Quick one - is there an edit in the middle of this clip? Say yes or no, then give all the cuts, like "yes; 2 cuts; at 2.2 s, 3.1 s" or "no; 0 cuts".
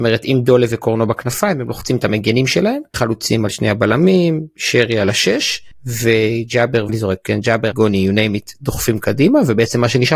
yes; 3 cuts; at 2.9 s, 6.9 s, 7.7 s